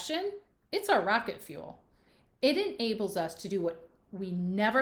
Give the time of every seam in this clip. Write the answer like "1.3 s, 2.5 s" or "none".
none